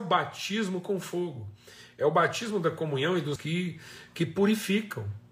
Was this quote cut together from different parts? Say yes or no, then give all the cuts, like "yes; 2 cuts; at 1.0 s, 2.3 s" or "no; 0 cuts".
yes; 1 cut; at 3.4 s